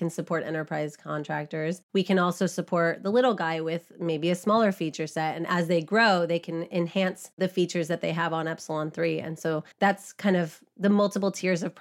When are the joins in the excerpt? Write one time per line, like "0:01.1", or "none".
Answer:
0:09.7